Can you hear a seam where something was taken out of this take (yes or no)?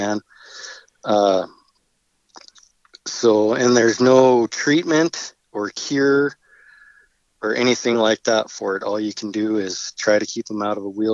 no